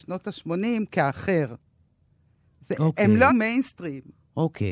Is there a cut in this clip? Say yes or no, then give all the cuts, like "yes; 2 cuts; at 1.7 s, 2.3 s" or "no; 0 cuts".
yes; 1 cut; at 3.3 s